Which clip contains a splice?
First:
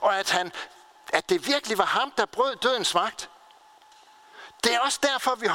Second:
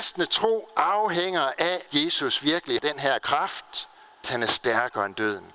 second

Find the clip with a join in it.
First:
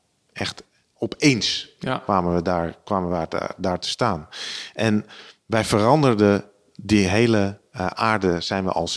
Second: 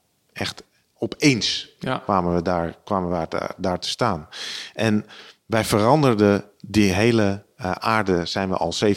second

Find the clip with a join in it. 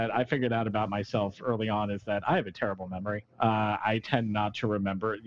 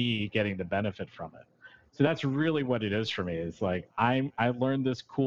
first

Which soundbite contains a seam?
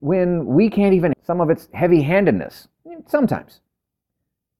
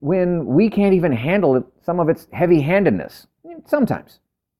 first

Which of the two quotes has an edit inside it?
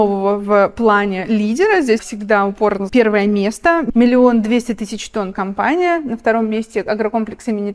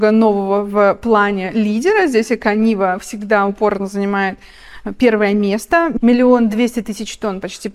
first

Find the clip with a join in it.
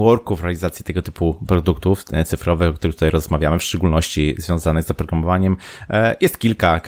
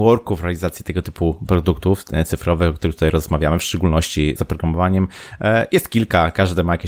second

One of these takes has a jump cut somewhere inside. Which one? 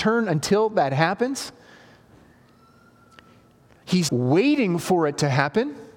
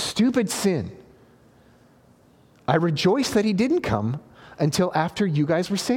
first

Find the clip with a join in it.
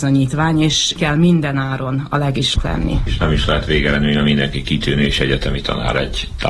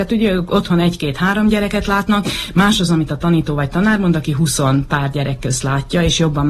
first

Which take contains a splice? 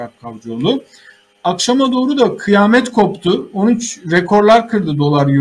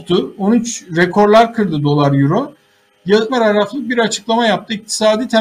second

